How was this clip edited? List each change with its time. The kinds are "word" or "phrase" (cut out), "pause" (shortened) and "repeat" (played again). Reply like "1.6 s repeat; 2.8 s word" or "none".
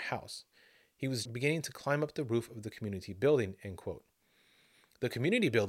1.3 s word